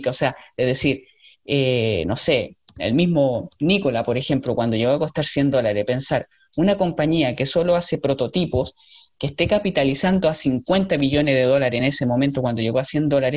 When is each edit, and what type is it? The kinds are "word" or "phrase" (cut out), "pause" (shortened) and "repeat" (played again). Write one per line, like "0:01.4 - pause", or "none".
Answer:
none